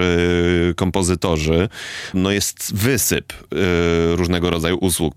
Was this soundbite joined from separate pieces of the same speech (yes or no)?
yes